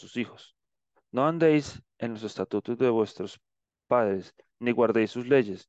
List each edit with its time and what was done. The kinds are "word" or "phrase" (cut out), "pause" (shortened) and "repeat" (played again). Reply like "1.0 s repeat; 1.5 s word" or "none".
none